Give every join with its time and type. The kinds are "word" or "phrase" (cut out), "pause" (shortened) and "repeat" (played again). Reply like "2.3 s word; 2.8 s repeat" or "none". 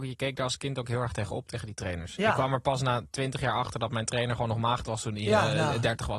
none